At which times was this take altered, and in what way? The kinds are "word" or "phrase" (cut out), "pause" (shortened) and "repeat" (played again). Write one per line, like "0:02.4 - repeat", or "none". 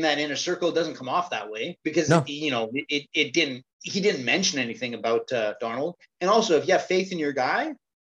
0:03.7 - pause